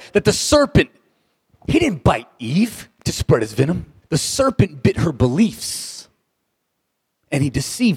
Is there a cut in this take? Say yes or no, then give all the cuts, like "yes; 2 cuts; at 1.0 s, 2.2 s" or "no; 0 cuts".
yes; 1 cut; at 4.0 s